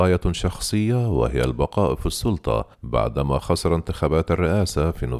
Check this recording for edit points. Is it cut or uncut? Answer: cut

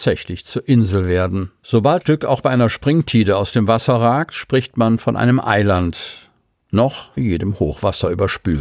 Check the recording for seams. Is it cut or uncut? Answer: cut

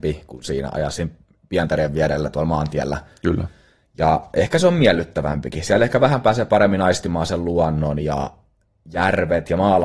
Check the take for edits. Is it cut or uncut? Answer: uncut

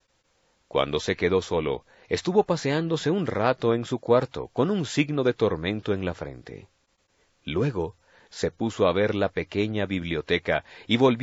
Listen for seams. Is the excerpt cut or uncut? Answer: uncut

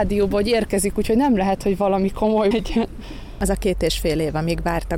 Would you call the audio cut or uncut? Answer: cut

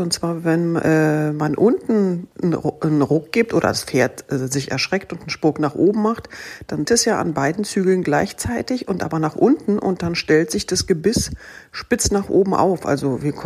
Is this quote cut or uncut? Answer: cut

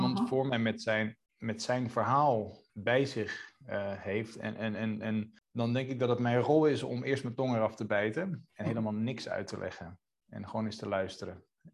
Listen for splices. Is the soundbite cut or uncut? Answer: cut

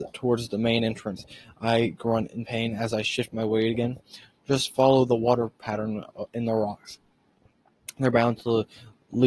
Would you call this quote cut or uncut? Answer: uncut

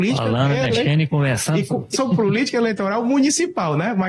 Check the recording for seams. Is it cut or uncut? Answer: cut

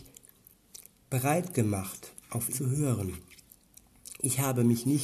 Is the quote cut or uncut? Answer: cut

